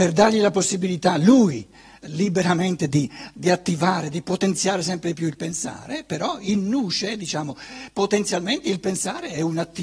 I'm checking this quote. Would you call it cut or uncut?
uncut